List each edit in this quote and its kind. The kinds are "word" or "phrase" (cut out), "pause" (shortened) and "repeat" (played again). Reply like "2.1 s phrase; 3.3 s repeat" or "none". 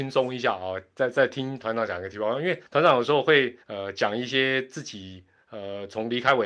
2.7 s pause; 3.6 s pause